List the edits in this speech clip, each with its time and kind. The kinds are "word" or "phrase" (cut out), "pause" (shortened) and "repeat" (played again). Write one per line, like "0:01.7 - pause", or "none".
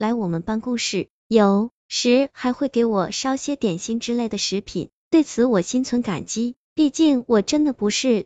0:01.8 - pause